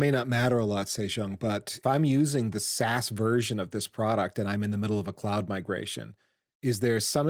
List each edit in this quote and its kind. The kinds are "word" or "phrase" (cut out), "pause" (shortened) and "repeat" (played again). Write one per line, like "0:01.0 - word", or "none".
0:01.8 - word